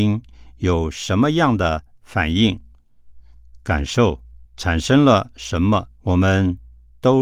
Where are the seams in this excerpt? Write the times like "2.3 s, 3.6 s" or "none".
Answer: 4.5 s, 6.0 s